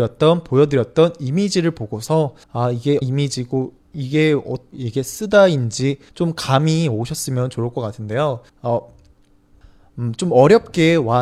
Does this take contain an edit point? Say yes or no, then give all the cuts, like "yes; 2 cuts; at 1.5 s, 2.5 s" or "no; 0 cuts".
yes; 6 cuts; at 2.4 s, 3.0 s, 3.8 s, 4.7 s, 6.1 s, 8.5 s